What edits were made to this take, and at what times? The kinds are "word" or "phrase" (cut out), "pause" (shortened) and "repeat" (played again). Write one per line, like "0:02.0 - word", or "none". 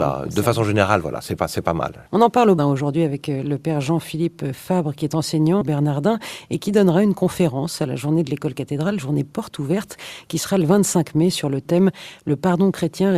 0:01.4 - word
0:02.6 - word
0:05.6 - word